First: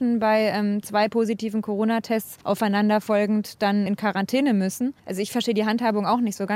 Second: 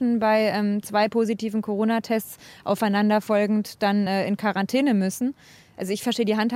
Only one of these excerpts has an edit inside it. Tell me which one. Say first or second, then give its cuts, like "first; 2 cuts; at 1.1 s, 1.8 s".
first; 3 cuts; at 2.4 s, 3.9 s, 5.0 s